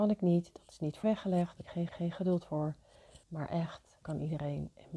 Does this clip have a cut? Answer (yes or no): yes